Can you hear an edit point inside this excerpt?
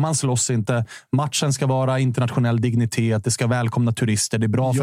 no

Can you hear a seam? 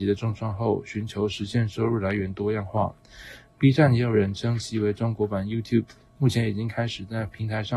no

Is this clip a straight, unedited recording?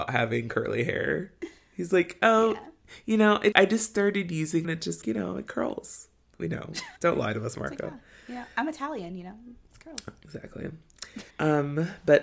no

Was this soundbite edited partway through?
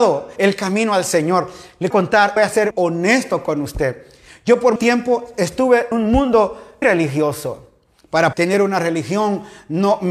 yes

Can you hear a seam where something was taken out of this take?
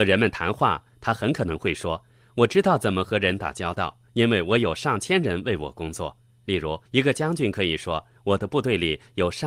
yes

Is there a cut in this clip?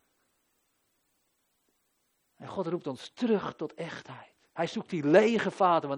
no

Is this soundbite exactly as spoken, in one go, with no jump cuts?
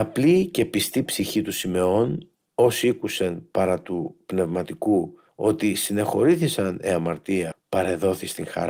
no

